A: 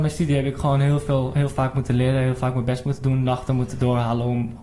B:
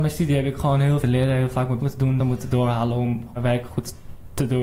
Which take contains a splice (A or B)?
B